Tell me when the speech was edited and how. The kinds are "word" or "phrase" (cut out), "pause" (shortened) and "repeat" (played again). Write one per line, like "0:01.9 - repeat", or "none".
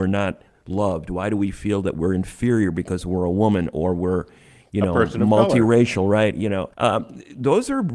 0:06.7 - pause

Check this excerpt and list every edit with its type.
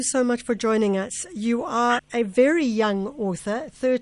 0:02.0 - word

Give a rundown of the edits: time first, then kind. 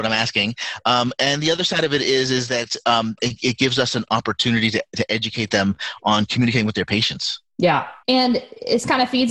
0:08.0 - pause

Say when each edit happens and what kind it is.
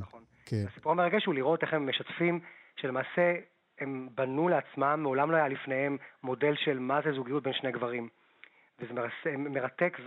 none

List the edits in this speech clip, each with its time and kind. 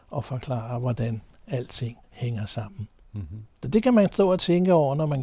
0:02.0 - pause
0:03.5 - pause

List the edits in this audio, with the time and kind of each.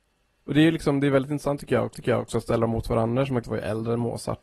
0:01.9 - repeat
0:03.4 - word

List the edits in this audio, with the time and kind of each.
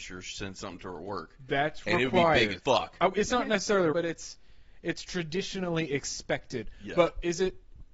0:02.6 - word
0:03.9 - word

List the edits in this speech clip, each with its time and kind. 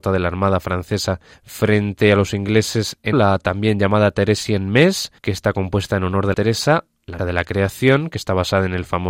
0:01.3 - pause
0:03.1 - word
0:05.2 - pause
0:06.3 - phrase
0:07.2 - word

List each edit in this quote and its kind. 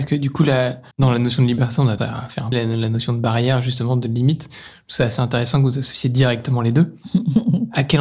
0:00.9 - pause
0:02.0 - word
0:02.5 - phrase

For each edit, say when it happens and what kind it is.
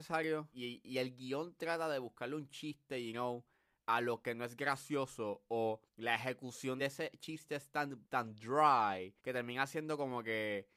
0:05.9 - pause
0:08.0 - pause
0:09.2 - pause

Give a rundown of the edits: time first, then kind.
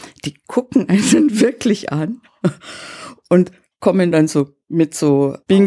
none

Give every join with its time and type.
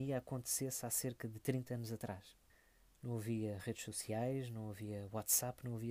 0:02.5 - pause

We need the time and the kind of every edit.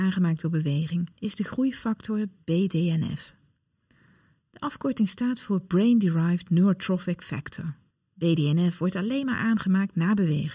0:01.1 - pause
0:07.9 - pause

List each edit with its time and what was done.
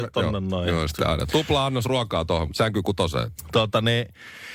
none

